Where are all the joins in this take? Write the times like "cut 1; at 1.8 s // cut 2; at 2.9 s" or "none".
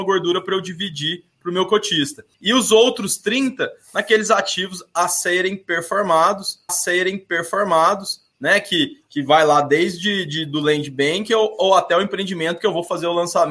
cut 1; at 2.3 s // cut 2; at 6.7 s